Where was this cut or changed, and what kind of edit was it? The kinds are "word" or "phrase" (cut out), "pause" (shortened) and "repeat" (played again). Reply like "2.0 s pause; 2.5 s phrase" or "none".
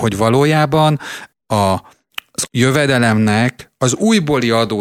1.3 s word; 2.5 s word